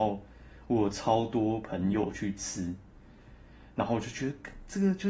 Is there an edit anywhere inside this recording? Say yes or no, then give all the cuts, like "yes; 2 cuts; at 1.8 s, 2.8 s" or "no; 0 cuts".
no; 0 cuts